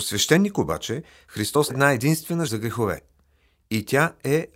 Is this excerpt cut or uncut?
cut